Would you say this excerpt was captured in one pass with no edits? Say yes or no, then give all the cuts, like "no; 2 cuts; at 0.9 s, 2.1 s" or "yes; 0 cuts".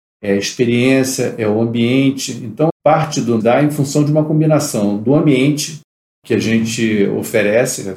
no; 2 cuts; at 2.7 s, 3.4 s